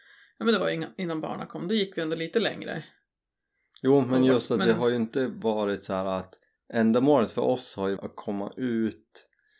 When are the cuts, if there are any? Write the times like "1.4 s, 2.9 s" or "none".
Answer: 6.6 s, 8.0 s